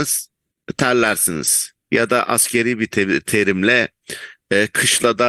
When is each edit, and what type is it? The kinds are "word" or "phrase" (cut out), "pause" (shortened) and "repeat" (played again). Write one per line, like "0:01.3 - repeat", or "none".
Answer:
0:01.8 - pause